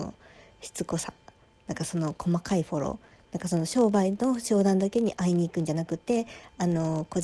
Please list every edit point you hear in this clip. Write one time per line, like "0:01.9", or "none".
none